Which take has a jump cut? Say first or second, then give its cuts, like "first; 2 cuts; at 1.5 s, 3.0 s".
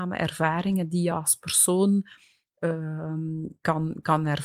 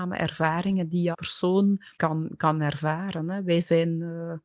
second; 2 cuts; at 1.1 s, 1.9 s